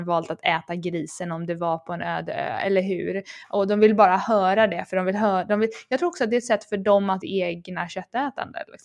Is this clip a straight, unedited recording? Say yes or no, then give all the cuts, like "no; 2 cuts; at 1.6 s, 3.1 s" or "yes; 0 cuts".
no; 1 cut; at 7.2 s